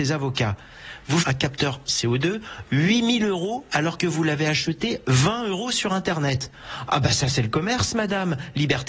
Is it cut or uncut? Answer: cut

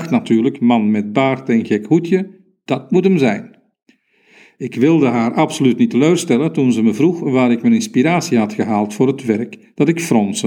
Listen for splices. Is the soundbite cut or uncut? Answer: uncut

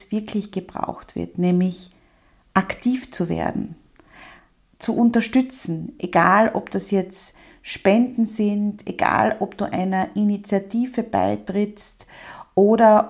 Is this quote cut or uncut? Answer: uncut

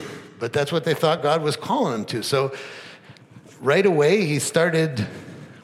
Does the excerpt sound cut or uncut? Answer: uncut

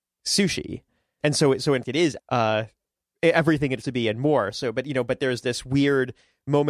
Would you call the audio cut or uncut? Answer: cut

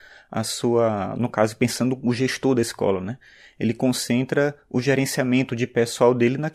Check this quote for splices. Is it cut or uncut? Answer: uncut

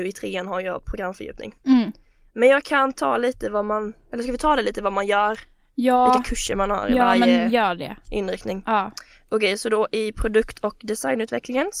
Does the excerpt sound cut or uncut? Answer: uncut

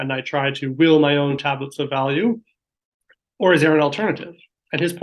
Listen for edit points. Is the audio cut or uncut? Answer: uncut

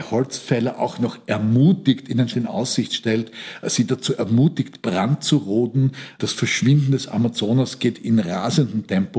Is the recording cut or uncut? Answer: cut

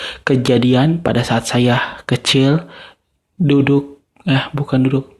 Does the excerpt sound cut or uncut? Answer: uncut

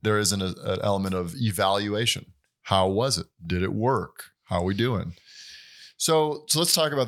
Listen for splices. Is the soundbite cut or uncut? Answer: cut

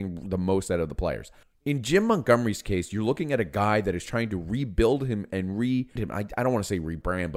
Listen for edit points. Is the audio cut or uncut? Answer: cut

